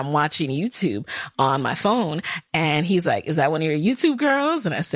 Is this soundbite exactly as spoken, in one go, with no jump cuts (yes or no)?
yes